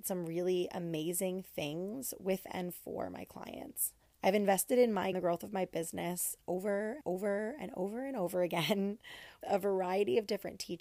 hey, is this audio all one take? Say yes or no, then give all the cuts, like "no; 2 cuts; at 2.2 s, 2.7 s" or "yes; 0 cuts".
no; 4 cuts; at 4.1 s, 5.1 s, 7.0 s, 9.4 s